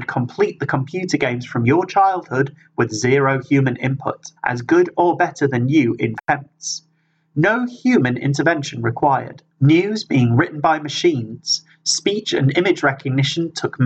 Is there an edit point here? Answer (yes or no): yes